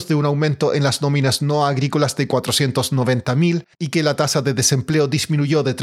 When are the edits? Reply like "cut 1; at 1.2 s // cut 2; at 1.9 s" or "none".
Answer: cut 1; at 3.7 s